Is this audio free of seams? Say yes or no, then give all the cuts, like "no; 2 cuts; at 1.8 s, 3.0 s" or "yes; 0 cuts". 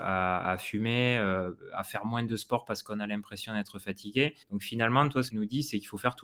no; 2 cuts; at 4.4 s, 5.3 s